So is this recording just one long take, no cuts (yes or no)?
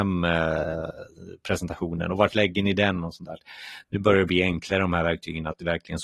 yes